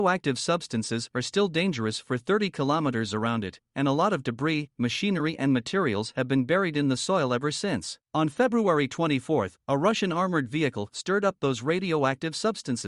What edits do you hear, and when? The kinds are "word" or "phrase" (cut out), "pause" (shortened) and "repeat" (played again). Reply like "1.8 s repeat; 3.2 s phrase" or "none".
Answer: 8.0 s pause